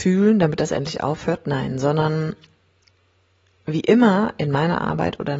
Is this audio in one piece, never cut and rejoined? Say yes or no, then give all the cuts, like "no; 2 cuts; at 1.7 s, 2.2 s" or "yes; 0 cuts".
yes; 0 cuts